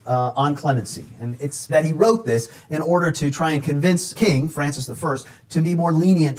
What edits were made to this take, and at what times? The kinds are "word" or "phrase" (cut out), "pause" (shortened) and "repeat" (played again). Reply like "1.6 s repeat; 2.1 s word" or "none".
1.7 s word; 4.2 s word